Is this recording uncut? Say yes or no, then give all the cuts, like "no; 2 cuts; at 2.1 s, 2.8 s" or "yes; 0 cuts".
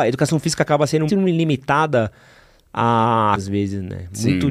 no; 2 cuts; at 1.1 s, 3.4 s